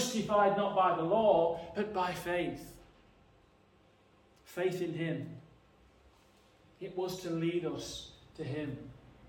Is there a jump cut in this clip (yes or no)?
no